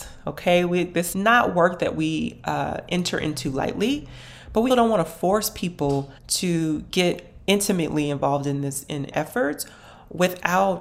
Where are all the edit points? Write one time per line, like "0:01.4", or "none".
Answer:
0:01.1
0:04.7
0:06.2
0:09.1